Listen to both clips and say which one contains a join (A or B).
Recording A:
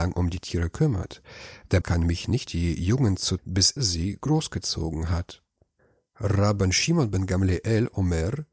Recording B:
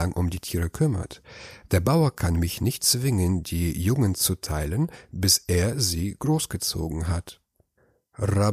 A